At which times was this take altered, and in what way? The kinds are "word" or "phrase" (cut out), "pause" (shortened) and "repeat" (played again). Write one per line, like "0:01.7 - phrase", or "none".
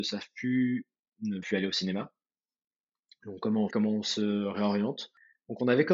0:01.4 - word
0:03.7 - word